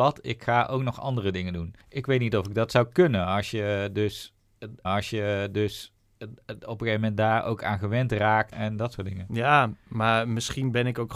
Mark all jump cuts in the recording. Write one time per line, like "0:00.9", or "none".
0:01.8
0:04.8
0:08.5